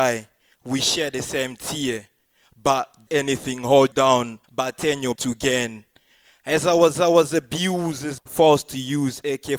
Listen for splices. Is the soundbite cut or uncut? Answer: cut